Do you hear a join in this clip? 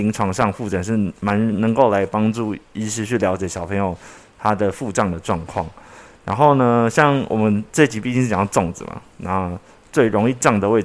no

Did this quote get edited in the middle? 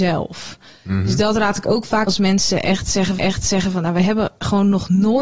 yes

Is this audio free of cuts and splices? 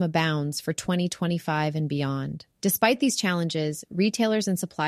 no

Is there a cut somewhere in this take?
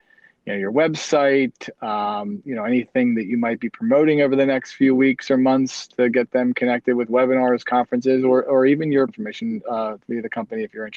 yes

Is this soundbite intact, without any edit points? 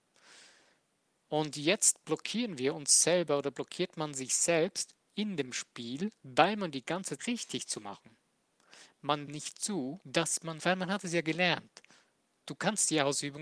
no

